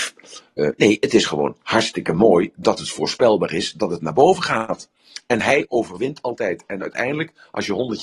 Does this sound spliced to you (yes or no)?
no